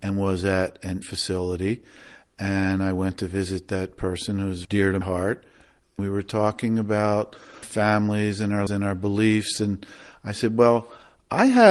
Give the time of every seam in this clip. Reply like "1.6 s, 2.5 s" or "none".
1.0 s, 4.6 s, 5.0 s, 7.6 s, 8.7 s